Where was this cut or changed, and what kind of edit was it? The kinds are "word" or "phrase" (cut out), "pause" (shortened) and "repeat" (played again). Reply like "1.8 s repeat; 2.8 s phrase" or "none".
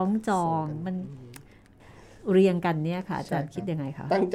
none

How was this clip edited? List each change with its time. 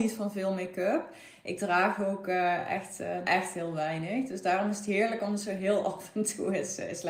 3.2 s word

